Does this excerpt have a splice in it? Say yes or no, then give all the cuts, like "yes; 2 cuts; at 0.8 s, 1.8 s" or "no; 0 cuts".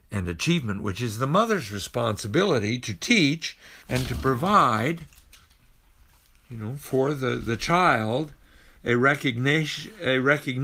yes; 1 cut; at 3.8 s